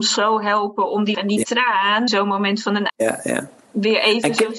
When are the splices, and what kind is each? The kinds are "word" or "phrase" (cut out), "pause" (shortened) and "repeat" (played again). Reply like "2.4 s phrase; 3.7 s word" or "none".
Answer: 1.1 s word; 2.1 s word; 2.9 s word